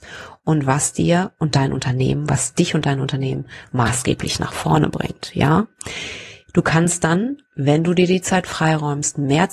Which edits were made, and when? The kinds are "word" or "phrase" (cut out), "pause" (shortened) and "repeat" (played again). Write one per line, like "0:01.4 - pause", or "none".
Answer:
0:06.4 - pause
0:07.5 - pause